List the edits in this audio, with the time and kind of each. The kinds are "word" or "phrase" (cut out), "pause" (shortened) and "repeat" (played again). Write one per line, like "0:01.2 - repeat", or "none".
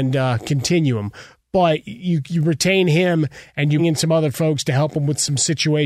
0:03.8 - word